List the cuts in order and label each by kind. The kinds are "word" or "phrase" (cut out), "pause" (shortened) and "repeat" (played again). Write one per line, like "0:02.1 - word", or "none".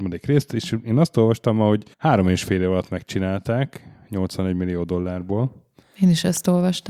0:01.9 - pause